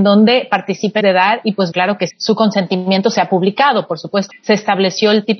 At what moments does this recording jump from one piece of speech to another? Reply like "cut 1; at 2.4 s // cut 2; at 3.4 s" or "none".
cut 1; at 1.0 s // cut 2; at 1.7 s // cut 3; at 2.1 s // cut 4; at 4.3 s